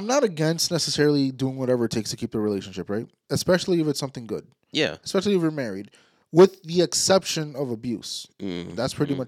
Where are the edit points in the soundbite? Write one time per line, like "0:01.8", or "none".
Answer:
none